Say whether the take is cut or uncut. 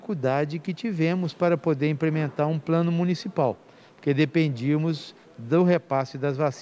uncut